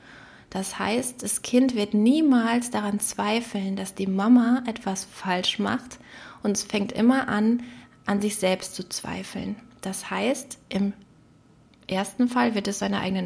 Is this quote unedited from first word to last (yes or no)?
yes